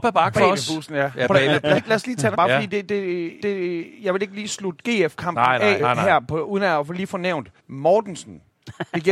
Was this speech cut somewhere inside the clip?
yes; 5 cuts; at 1.8 s, 2.3 s, 3.4 s, 5.8 s, 7.6 s

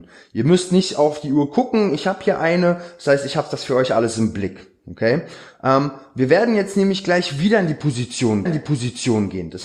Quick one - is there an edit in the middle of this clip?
yes; 1 cut; at 8.5 s

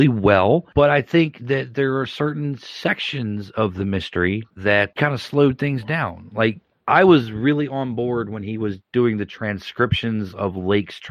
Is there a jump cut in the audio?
yes; 2 cuts; at 5.0 s, 6.8 s

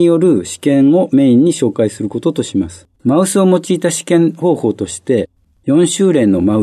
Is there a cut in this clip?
yes; 1 cut; at 2.9 s

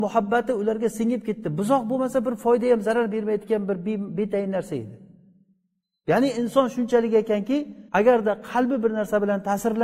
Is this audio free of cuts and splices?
no; 1 cut; at 7.9 s

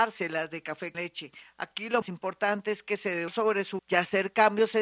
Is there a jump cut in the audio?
yes; 4 cuts; at 0.9 s, 2.0 s, 3.3 s, 3.8 s

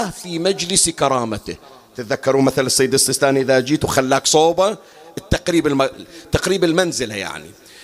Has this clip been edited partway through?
no; 0 cuts

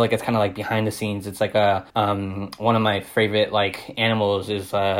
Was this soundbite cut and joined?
yes; 1 cut; at 1.9 s

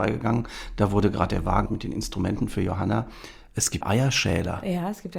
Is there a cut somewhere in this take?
yes; 2 cuts; at 1.7 s, 3.8 s

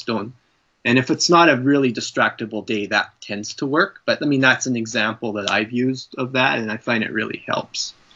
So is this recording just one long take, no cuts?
yes; 0 cuts

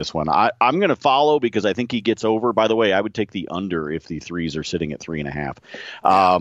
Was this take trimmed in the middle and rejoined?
no; 0 cuts

